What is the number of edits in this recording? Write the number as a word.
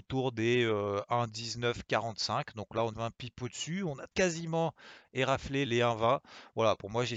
three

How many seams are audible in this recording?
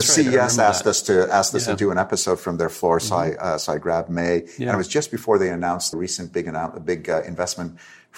one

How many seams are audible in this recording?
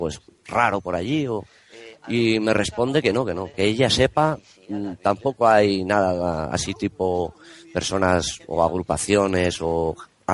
one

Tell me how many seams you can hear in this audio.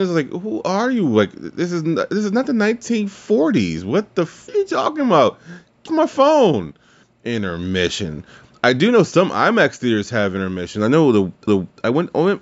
three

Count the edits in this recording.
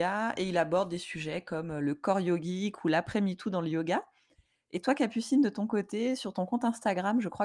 zero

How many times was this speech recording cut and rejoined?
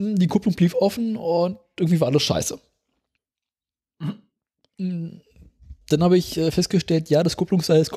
one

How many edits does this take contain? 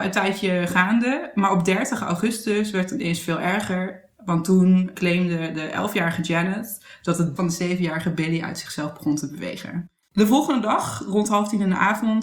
one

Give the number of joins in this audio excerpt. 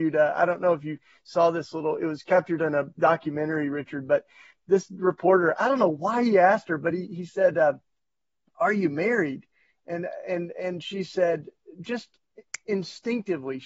zero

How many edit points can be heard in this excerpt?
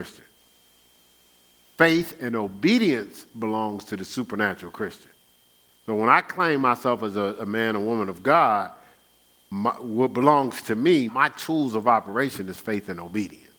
one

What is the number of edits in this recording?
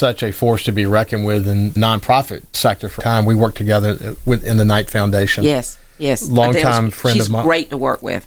three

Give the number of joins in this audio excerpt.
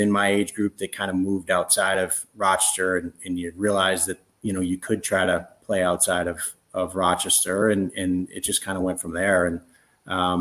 zero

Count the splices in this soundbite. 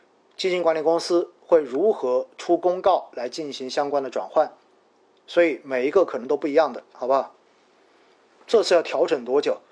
zero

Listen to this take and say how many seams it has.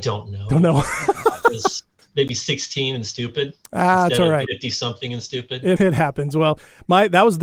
three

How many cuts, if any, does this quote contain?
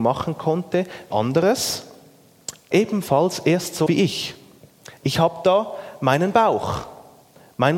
three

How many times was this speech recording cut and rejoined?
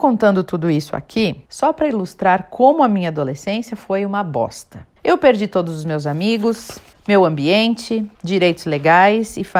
four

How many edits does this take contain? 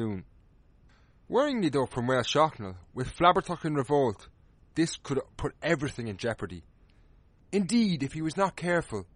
zero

